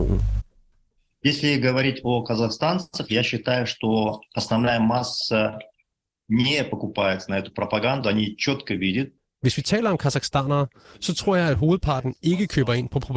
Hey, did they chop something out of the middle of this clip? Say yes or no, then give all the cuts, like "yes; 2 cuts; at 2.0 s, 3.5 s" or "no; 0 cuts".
no; 0 cuts